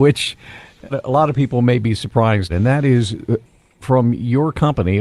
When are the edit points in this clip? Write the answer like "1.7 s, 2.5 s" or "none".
0.9 s, 2.5 s